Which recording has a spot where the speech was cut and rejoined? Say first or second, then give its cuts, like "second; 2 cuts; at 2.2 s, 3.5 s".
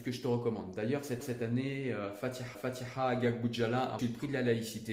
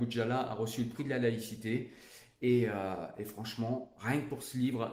first; 3 cuts; at 1.2 s, 2.5 s, 4.0 s